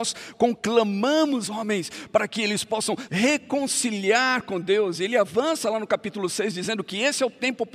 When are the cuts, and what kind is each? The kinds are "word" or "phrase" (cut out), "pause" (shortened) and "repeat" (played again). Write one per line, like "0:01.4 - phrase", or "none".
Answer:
0:01.5 - word
0:03.1 - word

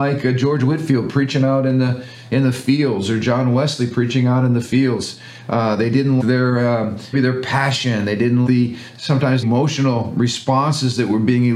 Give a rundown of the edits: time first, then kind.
0:06.2 - word
0:07.1 - word
0:08.5 - word
0:09.4 - word

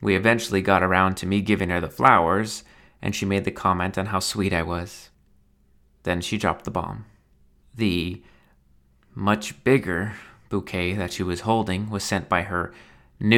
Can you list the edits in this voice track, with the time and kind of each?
none

